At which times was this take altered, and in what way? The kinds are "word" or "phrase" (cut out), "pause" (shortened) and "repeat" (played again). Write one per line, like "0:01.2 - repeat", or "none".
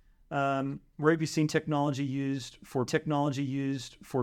0:02.9 - repeat